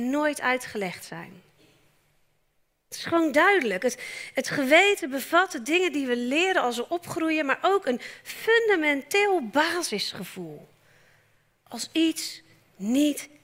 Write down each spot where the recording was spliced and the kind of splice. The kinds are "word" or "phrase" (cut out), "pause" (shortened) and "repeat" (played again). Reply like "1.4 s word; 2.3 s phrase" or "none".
none